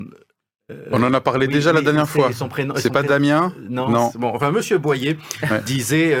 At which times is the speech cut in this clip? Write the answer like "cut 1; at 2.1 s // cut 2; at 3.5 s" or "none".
none